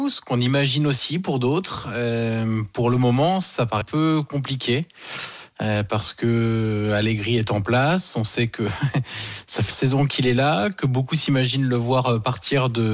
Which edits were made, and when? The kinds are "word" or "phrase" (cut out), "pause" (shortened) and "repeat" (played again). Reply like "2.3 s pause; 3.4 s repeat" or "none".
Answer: 3.8 s word; 9.7 s word